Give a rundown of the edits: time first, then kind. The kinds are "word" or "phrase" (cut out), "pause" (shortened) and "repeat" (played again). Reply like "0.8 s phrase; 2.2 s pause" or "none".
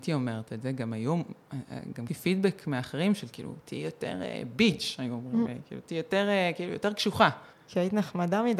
2.1 s word; 7.5 s pause